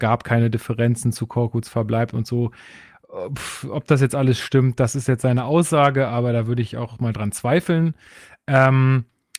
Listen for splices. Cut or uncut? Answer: uncut